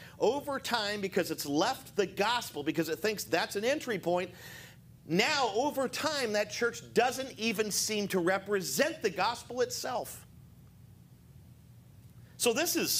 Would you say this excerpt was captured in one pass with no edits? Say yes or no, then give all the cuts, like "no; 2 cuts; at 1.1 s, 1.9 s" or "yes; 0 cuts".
no; 1 cut; at 5.0 s